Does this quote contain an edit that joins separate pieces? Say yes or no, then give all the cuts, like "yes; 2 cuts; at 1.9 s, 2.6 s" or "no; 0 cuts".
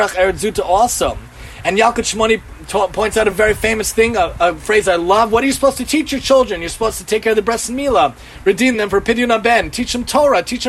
no; 0 cuts